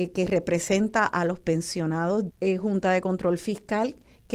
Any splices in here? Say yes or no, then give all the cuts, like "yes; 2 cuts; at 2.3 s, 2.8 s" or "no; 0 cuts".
yes; 1 cut; at 2.3 s